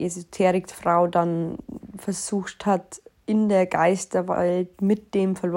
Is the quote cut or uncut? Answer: uncut